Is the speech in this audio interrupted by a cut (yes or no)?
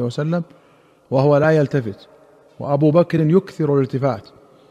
no